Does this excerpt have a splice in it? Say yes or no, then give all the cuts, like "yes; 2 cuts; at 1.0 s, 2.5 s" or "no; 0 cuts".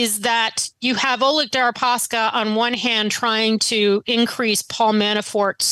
no; 0 cuts